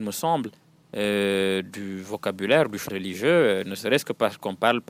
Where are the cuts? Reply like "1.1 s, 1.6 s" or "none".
2.9 s